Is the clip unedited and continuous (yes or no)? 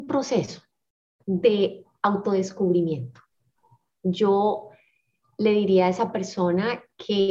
yes